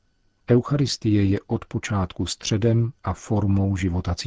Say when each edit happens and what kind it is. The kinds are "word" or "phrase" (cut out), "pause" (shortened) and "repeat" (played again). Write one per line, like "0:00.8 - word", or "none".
none